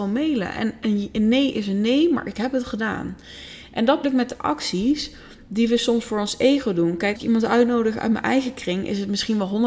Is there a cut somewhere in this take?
yes; 2 cuts; at 4.0 s, 7.2 s

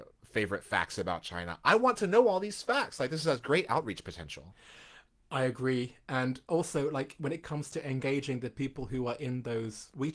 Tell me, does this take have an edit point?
no; 0 cuts

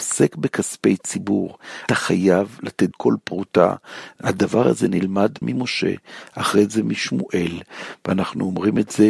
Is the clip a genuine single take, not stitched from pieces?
no; 3 cuts; at 1.9 s, 2.9 s, 5.4 s

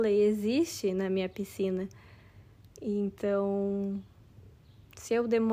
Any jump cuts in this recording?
yes; 1 cut; at 2.7 s

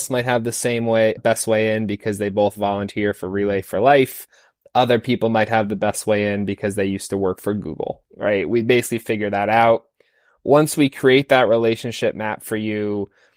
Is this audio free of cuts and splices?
no; 2 cuts; at 1.2 s, 8.1 s

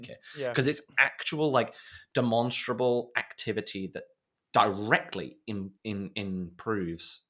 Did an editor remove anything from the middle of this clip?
yes; 1 cut; at 5.8 s

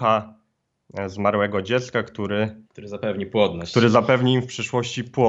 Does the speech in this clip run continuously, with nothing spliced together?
no; 1 cut; at 2.7 s

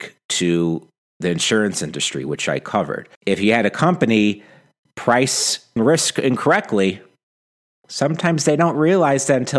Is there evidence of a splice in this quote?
yes; 2 cuts; at 3.1 s, 5.8 s

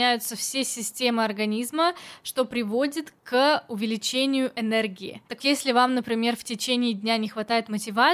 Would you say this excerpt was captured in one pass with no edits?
no; 1 cut; at 5.4 s

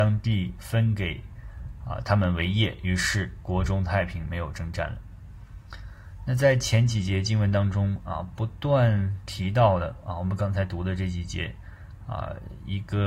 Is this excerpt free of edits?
yes; 0 cuts

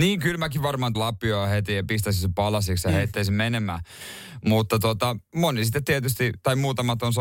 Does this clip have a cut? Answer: yes; 1 cut; at 0.9 s

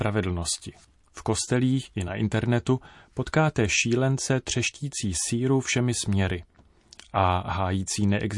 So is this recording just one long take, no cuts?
yes; 0 cuts

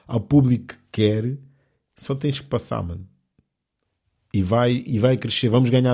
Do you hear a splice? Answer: no; 0 cuts

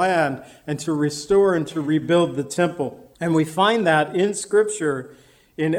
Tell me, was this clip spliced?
yes; 1 cut; at 3.1 s

